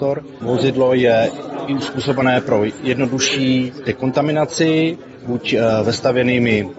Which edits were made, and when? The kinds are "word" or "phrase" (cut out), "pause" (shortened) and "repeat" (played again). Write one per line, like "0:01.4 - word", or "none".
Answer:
none